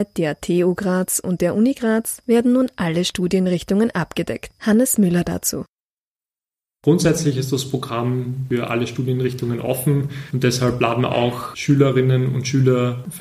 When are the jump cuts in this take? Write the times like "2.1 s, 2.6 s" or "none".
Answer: none